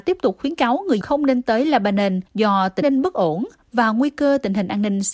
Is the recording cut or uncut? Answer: cut